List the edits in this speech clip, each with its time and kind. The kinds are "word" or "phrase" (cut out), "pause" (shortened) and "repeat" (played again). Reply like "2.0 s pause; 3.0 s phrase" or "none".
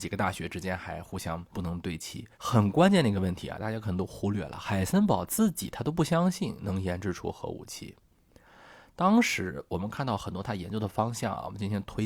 1.5 s pause; 2.3 s pause

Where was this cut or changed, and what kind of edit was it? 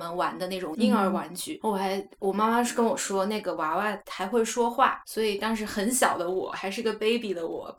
1.6 s word

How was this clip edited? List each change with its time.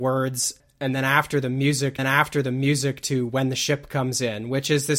2.0 s repeat

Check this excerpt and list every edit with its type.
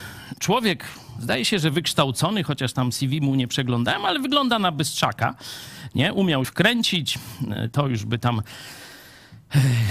6.4 s word

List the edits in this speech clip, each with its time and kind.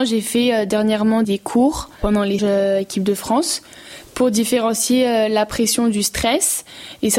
1.2 s word; 2.4 s word

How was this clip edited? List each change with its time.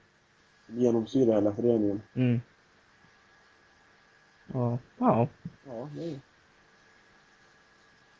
2.1 s pause; 5.6 s pause

